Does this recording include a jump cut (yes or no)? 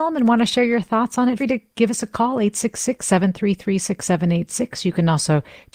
yes